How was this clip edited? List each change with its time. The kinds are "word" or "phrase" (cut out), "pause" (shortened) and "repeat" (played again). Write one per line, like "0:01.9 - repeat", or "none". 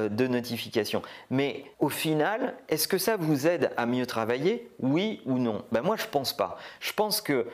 0:01.7 - pause